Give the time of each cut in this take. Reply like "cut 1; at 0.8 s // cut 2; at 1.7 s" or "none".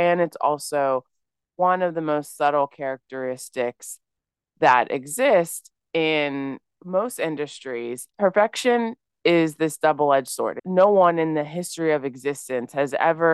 none

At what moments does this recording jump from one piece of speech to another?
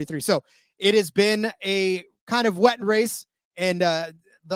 cut 1; at 2.8 s

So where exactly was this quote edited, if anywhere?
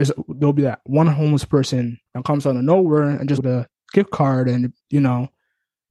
cut 1; at 2.1 s // cut 2; at 3.4 s // cut 3; at 4.8 s

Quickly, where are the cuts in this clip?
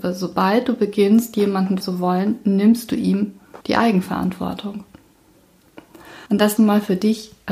cut 1; at 1.8 s // cut 2; at 3.6 s // cut 3; at 6.3 s // cut 4; at 6.6 s

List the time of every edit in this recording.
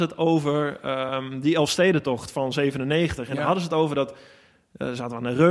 none

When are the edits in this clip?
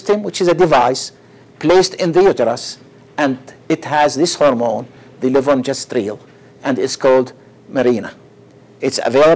none

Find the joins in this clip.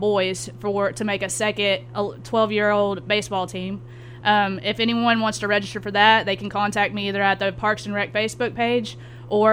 none

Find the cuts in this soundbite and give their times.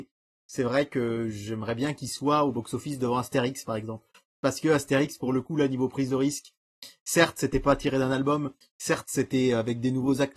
none

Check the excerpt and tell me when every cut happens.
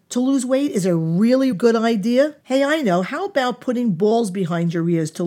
cut 1; at 1.5 s // cut 2; at 2.4 s

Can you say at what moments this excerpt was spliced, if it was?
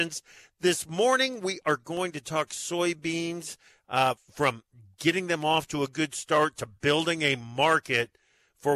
none

